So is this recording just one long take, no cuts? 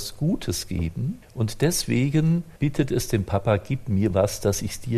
no; 2 cuts; at 1.2 s, 2.6 s

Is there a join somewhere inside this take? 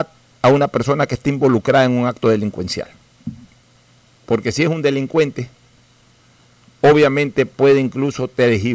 no; 0 cuts

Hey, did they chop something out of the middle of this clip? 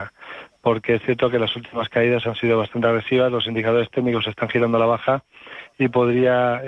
no; 0 cuts

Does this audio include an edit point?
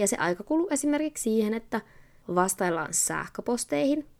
no; 0 cuts

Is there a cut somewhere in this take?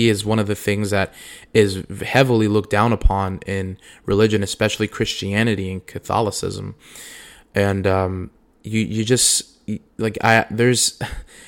no; 0 cuts

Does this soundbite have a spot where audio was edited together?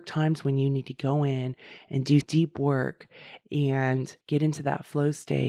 yes; 2 cuts; at 2.2 s, 4.2 s

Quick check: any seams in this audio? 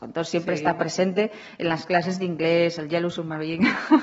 no; 0 cuts

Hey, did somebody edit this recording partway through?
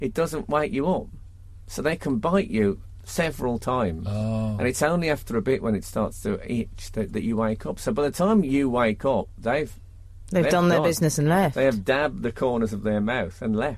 no; 0 cuts

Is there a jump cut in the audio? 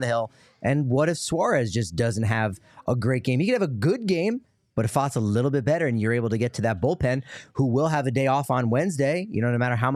no; 0 cuts

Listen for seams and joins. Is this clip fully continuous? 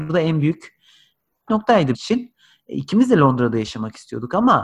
no; 2 cuts; at 1.5 s, 1.9 s

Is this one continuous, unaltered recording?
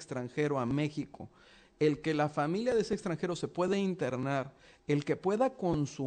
yes; 0 cuts

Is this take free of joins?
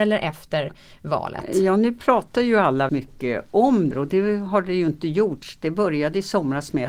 no; 2 cuts; at 2.9 s, 3.9 s

